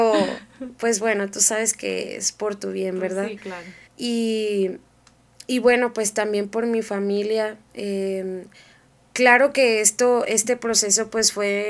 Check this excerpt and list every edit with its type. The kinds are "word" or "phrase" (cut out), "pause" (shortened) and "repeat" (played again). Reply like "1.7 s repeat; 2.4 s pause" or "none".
3.9 s pause